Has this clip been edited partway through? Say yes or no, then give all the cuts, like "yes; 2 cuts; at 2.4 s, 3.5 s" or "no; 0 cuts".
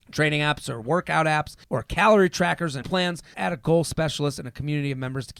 yes; 3 cuts; at 1.6 s, 2.8 s, 3.3 s